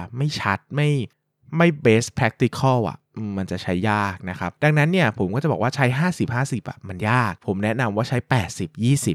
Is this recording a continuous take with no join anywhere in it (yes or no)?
yes